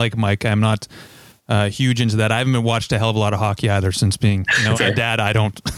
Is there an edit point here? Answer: yes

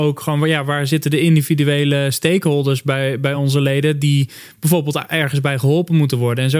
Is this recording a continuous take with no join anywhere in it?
yes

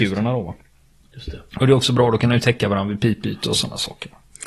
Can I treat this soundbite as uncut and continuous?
yes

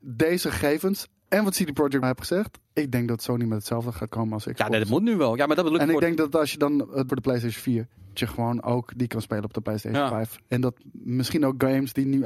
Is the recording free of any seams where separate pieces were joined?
no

